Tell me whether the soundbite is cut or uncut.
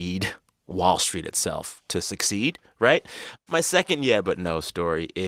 uncut